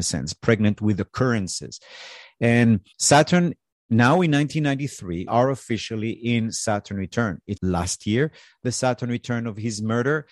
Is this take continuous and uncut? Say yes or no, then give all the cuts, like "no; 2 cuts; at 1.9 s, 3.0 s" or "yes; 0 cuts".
no; 3 cuts; at 2.9 s, 5.3 s, 7.6 s